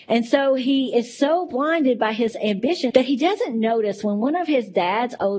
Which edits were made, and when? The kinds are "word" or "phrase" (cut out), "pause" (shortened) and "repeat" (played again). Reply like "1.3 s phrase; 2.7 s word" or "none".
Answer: 0.9 s word; 2.9 s word